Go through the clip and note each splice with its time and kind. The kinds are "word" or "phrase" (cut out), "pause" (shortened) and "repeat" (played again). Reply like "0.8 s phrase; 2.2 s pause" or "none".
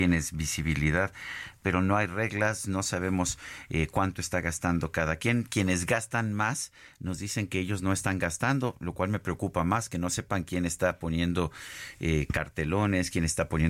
none